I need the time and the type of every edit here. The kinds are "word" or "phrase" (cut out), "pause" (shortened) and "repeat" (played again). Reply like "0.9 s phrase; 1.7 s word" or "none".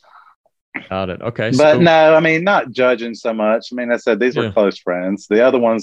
none